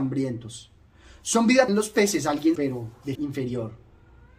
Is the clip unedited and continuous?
no; 3 cuts; at 1.7 s, 2.6 s, 3.2 s

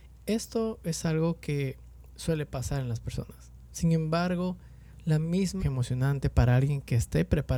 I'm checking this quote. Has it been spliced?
yes; 1 cut; at 5.6 s

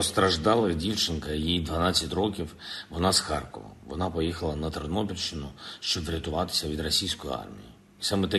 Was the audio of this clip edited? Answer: no; 0 cuts

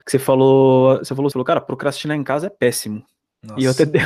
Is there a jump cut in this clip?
yes; 1 cut; at 1.3 s

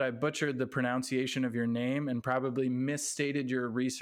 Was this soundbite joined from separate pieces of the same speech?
no; 0 cuts

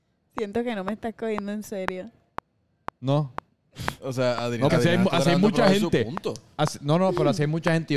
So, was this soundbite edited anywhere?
yes; 1 cut; at 4.7 s

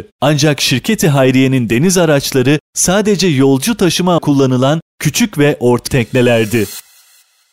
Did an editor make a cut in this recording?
yes; 2 cuts; at 4.2 s, 5.9 s

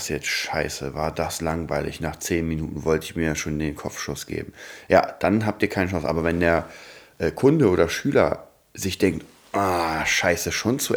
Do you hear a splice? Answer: no; 0 cuts

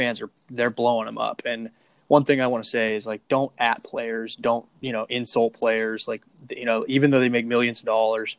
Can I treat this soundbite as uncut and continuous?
yes; 0 cuts

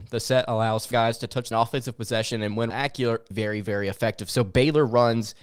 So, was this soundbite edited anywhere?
yes; 4 cuts; at 0.9 s, 1.5 s, 2.7 s, 3.3 s

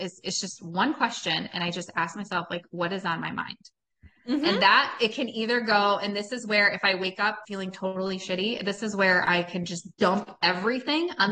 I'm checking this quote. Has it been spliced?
yes; 2 cuts; at 7.4 s, 9.9 s

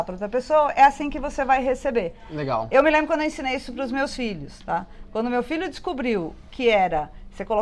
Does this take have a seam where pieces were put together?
no; 0 cuts

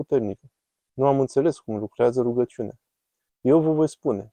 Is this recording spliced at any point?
no; 0 cuts

